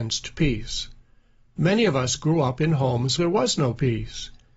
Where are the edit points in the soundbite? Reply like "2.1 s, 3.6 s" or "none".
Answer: 3.2 s